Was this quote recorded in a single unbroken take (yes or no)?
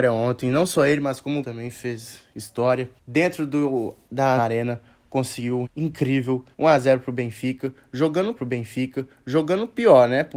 no